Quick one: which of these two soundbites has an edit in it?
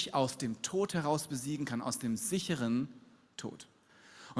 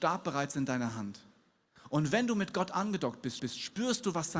second; 1 cut; at 3.4 s

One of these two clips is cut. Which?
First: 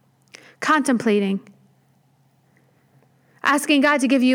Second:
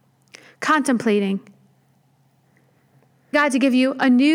second; 1 cut; at 3.3 s

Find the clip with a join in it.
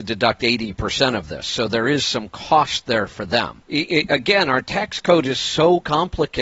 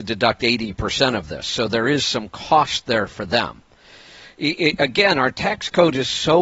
first; 1 cut; at 3.6 s

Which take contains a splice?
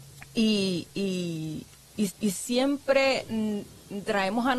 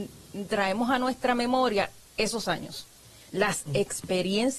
first; 1 cut; at 2.1 s

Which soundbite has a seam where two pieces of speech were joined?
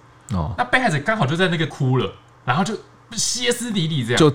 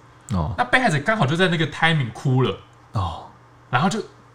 first; 2 cuts; at 1.7 s, 2.3 s

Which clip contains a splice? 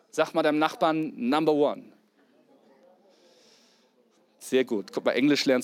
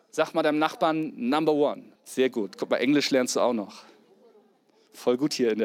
second; 1 cut; at 2.0 s

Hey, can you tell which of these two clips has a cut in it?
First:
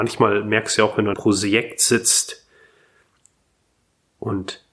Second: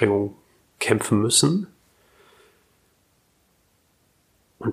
first; 1 cut; at 1.1 s

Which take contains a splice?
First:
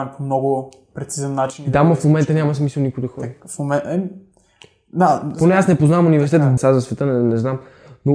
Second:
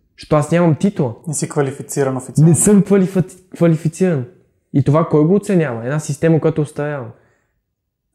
first; 1 cut; at 6.6 s

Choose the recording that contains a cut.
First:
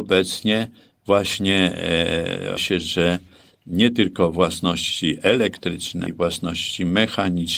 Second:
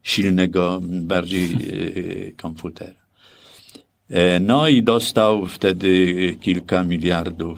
first; 2 cuts; at 2.6 s, 6.1 s

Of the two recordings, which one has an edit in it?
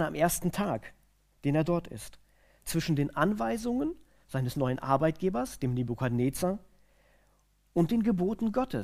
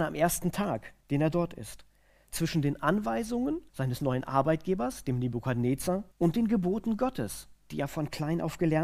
second; 3 cuts; at 1.0 s, 3.7 s, 6.1 s

